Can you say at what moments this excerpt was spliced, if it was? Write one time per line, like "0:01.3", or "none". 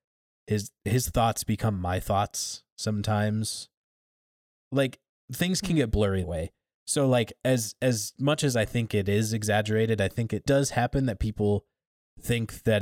0:06.2
0:10.5